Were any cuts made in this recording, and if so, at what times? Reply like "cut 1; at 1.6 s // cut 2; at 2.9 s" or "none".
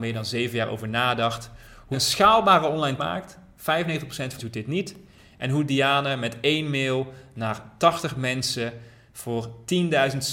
cut 1; at 1.9 s // cut 2; at 3.0 s // cut 3; at 4.4 s